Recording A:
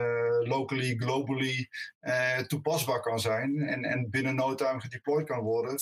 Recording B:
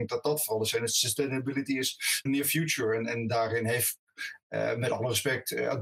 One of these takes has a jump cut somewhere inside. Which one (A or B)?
B